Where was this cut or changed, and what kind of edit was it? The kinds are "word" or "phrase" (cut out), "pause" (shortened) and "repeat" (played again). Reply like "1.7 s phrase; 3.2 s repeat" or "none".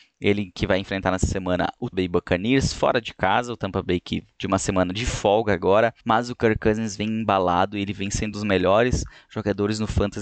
1.9 s word; 4.3 s word; 6.0 s pause; 8.3 s word